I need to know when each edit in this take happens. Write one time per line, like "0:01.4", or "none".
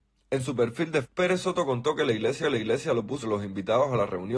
0:01.0
0:02.4
0:03.2